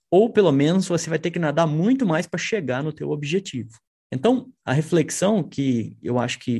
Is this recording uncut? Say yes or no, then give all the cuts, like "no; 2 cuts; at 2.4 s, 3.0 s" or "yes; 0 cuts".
no; 1 cut; at 3.9 s